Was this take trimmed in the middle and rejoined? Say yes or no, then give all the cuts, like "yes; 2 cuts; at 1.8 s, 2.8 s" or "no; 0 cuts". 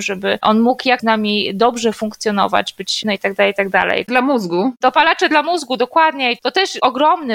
yes; 3 cuts; at 1.0 s, 3.0 s, 4.1 s